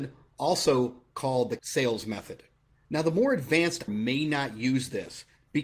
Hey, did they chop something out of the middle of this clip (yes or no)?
yes